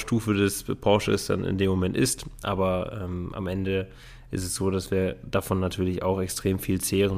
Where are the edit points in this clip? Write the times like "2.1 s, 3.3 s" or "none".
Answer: none